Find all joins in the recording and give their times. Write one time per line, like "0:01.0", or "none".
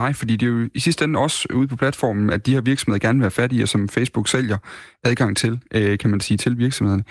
none